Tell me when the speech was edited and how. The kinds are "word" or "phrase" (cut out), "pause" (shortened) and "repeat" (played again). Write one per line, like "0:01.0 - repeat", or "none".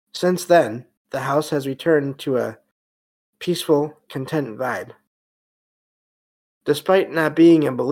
0:04.1 - word